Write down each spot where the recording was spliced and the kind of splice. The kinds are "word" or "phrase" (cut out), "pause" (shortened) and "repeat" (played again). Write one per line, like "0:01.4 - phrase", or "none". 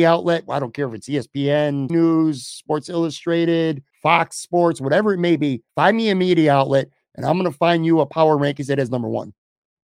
0:01.9 - word
0:03.9 - pause
0:05.7 - pause
0:08.9 - phrase